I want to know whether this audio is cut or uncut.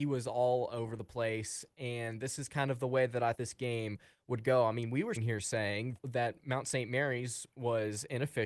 cut